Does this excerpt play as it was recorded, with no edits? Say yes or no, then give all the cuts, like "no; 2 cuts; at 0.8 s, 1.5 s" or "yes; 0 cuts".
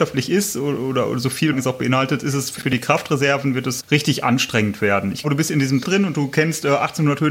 no; 5 cuts; at 1.5 s, 2.6 s, 3.8 s, 5.2 s, 5.8 s